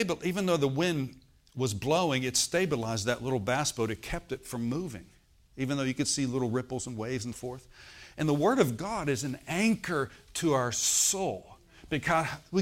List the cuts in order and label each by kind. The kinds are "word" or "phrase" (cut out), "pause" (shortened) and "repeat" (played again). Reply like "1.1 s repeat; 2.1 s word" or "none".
7.3 s word